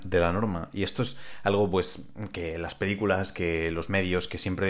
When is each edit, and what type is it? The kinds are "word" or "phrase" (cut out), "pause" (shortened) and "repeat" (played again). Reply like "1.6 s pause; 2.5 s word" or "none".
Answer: none